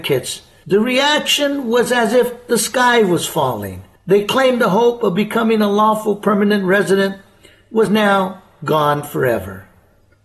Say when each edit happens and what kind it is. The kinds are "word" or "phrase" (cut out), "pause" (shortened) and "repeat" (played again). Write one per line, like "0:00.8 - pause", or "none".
none